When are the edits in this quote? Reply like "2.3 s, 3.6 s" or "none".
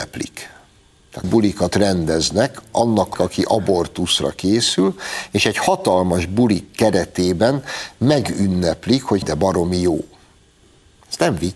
1.2 s, 3.1 s, 9.2 s